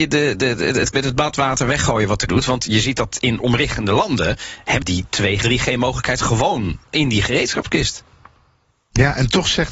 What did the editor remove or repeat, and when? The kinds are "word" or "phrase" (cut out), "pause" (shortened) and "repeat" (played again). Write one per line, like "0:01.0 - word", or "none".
0:00.9 - word
0:02.3 - word
0:03.4 - word
0:04.8 - word
0:05.4 - word